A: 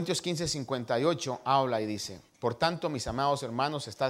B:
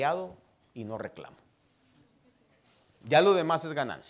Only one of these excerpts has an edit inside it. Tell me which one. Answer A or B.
A